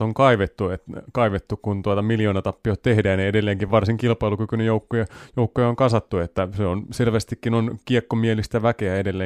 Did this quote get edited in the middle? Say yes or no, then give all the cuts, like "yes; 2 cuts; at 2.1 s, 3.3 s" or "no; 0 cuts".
no; 0 cuts